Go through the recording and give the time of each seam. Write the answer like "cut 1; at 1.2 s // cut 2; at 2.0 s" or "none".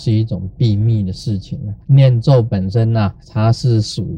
cut 1; at 1.8 s // cut 2; at 3.2 s